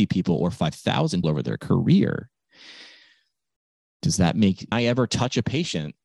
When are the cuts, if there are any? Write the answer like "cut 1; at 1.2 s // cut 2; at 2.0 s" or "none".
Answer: cut 1; at 1.2 s // cut 2; at 4.7 s